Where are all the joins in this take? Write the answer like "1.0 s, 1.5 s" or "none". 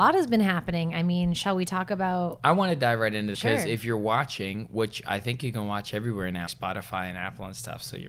3.3 s, 6.5 s